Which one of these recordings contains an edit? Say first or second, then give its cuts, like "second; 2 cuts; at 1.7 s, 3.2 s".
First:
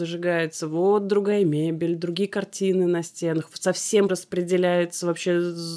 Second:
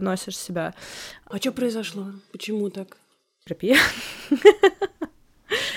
first; 1 cut; at 4.1 s